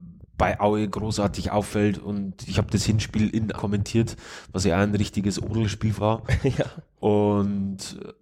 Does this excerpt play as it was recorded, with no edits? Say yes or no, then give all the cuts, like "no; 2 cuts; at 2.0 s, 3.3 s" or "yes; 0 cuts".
no; 2 cuts; at 3.5 s, 6.0 s